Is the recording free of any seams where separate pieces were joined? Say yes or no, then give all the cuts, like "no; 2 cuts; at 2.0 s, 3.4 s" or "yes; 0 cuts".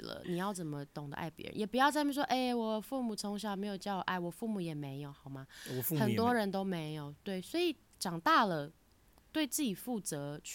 yes; 0 cuts